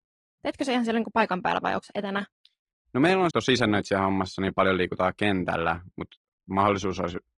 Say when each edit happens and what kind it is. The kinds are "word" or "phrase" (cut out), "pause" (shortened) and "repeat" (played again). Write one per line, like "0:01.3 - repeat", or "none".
0:03.3 - phrase